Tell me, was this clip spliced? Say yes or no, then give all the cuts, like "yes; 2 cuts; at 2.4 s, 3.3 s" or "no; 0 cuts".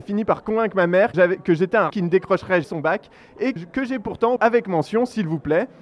yes; 5 cuts; at 1.1 s, 1.9 s, 2.6 s, 3.6 s, 4.4 s